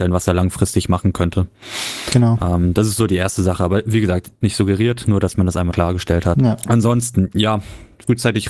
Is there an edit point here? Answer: yes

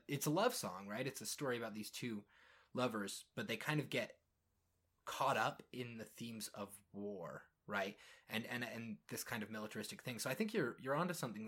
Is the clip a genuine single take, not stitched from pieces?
yes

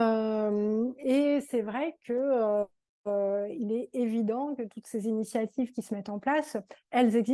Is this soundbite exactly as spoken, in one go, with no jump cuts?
yes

